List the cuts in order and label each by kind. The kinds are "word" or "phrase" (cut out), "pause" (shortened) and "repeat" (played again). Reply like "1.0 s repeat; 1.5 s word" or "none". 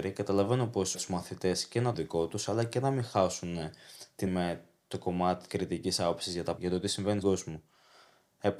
0.9 s phrase; 1.9 s phrase; 4.3 s word; 5.5 s word; 6.6 s word; 7.2 s word